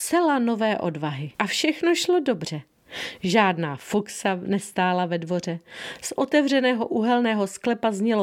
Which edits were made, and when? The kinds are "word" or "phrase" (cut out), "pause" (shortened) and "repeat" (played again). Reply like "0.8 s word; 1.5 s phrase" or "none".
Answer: 1.3 s pause